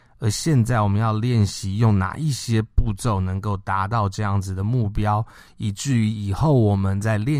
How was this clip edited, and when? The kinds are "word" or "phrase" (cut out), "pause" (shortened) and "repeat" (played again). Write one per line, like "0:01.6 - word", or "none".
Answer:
none